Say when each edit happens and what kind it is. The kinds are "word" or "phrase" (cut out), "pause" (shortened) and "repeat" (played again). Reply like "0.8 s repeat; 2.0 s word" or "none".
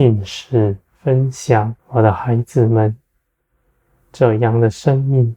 1.8 s pause